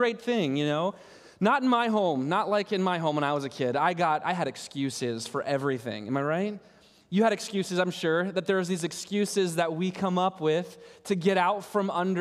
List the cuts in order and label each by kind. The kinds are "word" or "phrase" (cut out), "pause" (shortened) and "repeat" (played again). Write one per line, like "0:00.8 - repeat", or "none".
none